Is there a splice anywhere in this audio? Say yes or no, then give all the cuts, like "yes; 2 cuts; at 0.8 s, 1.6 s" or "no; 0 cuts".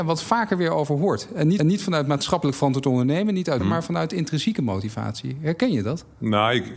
yes; 2 cuts; at 1.6 s, 3.6 s